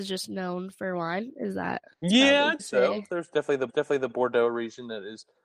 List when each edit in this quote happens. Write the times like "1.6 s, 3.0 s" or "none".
1.9 s, 2.6 s, 3.7 s